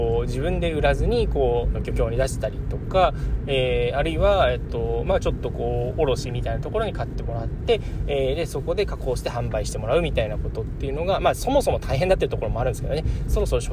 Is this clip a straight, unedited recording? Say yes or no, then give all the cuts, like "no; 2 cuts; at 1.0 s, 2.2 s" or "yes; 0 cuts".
no; 1 cut; at 1.7 s